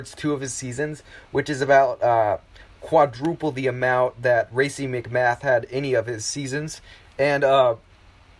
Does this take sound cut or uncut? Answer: uncut